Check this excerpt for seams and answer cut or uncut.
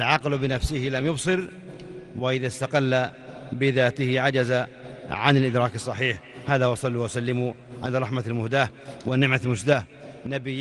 uncut